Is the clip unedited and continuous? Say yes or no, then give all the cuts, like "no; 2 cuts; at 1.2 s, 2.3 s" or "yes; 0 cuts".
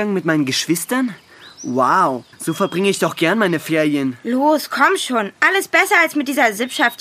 no; 1 cut; at 2.3 s